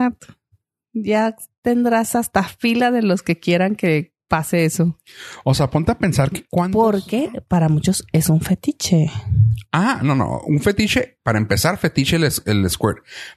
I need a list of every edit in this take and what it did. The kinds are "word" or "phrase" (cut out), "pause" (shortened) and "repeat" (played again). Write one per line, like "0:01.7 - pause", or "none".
none